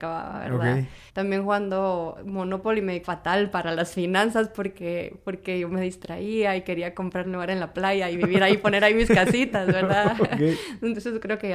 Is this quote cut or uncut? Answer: cut